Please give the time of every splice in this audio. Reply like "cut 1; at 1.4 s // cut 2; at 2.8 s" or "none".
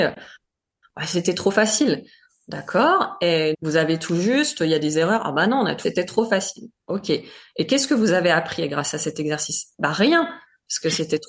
cut 1; at 3.5 s // cut 2; at 5.8 s